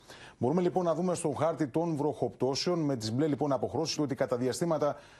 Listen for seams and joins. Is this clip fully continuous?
no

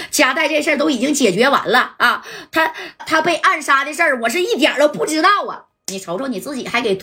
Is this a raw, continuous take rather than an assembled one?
no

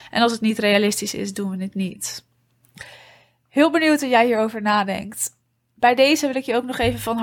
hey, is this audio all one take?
yes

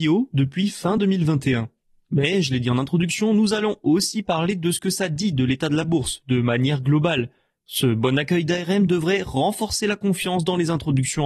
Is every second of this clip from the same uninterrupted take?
yes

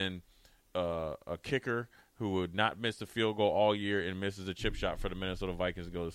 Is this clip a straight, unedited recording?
yes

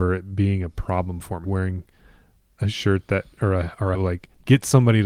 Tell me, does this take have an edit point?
yes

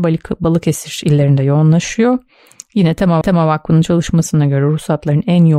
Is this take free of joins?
no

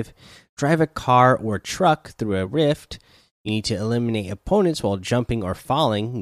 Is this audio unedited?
yes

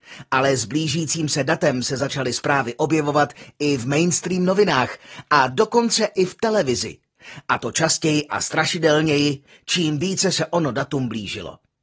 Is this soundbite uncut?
yes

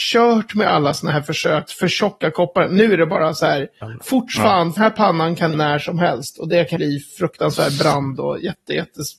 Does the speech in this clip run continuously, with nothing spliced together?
no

